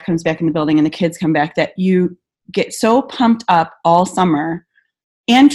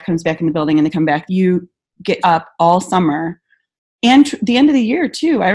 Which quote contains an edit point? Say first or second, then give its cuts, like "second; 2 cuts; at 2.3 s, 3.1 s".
second; 3 cuts; at 0.9 s, 1.3 s, 2.2 s